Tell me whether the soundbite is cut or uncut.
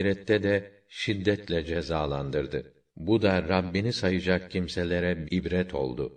cut